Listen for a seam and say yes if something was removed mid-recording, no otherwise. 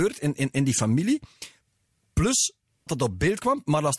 yes